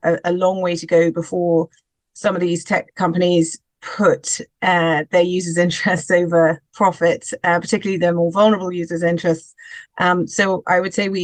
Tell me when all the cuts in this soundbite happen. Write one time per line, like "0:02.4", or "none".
none